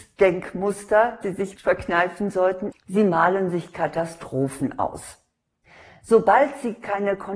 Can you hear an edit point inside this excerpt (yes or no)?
yes